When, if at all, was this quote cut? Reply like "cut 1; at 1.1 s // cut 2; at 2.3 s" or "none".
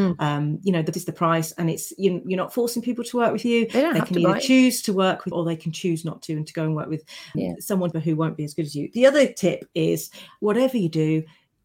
cut 1; at 0.9 s // cut 2; at 5.3 s // cut 3; at 7.3 s // cut 4; at 7.9 s